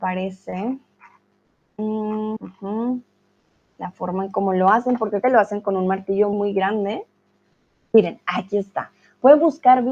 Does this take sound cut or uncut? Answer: cut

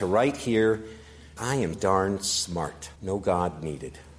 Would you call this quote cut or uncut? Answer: cut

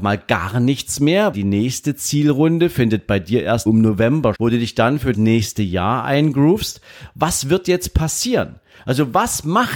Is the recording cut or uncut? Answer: cut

